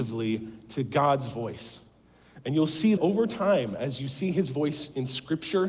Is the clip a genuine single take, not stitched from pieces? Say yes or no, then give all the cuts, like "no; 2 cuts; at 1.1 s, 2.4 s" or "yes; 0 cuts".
no; 1 cut; at 3.0 s